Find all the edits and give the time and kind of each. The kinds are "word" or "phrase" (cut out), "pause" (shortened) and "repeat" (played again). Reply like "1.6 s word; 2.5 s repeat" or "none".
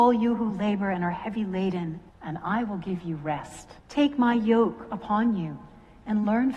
2.1 s pause; 3.8 s pause